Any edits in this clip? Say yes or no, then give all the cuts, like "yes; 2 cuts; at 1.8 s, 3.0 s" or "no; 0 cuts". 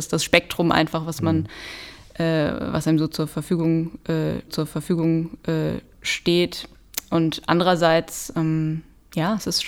yes; 1 cut; at 4.5 s